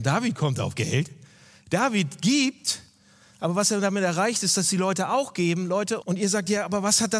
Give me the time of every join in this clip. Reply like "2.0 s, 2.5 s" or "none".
6.0 s